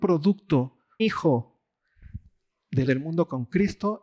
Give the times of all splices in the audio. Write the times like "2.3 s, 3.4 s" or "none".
1.0 s, 2.8 s